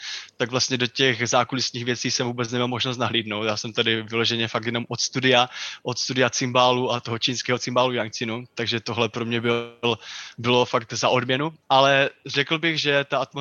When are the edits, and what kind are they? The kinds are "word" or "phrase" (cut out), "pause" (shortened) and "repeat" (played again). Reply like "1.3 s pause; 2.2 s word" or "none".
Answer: 11.6 s pause